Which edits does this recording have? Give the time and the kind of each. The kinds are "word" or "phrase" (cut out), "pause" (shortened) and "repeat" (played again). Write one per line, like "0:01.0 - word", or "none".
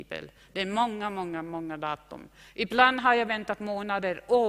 none

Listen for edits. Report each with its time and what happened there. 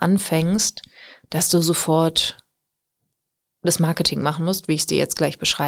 none

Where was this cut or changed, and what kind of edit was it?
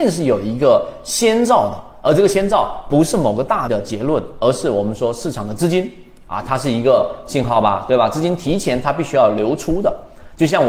0:03.7 - word

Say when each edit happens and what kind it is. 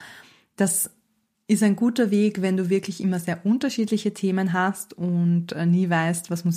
none

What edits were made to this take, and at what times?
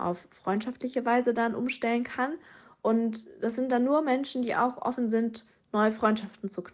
none

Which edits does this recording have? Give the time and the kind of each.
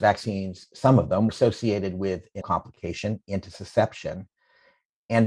0:01.3 - word
0:02.4 - word

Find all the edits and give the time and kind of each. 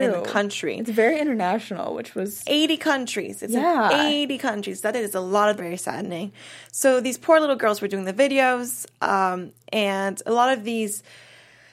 0:05.6 - phrase

